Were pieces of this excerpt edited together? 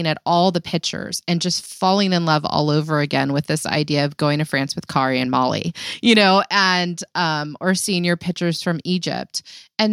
no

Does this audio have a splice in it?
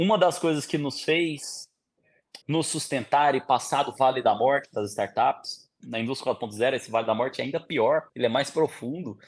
yes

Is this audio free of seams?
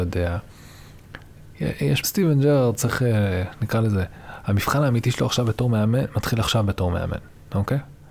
no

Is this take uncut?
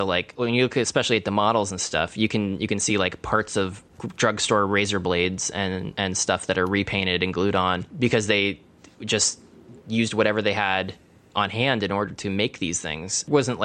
yes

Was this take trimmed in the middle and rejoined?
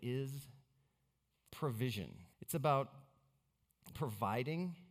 yes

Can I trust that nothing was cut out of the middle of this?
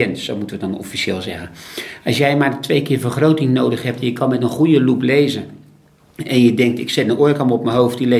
yes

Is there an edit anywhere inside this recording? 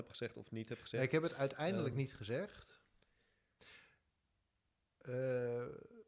no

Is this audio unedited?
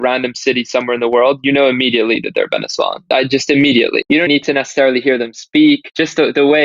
no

